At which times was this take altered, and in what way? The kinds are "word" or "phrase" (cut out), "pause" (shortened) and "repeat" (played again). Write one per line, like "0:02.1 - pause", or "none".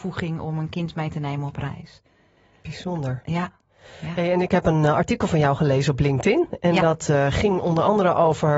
none

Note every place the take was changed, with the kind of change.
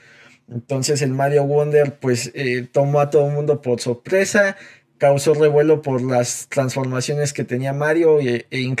none

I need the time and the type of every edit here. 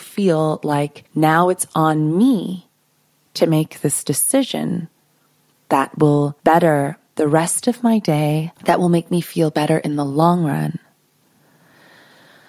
0:01.1 - pause
0:06.4 - pause
0:08.6 - pause

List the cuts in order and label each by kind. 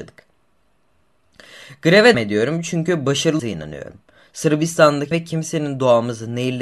0:02.1 - word
0:03.4 - word
0:05.1 - phrase

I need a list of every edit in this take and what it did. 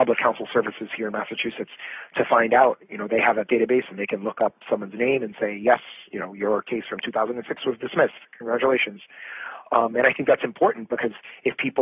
none

